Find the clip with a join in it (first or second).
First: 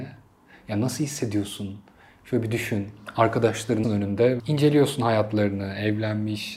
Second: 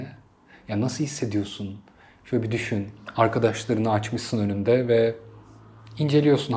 first